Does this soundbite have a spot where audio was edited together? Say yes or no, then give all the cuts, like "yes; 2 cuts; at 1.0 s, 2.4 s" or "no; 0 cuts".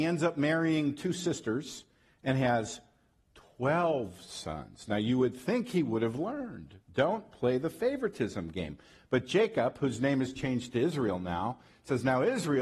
no; 0 cuts